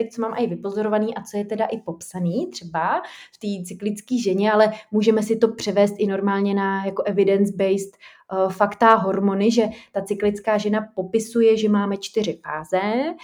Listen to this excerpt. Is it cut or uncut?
uncut